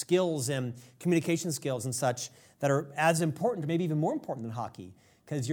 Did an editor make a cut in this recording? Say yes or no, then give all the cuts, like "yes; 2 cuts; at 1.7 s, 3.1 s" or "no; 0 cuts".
no; 0 cuts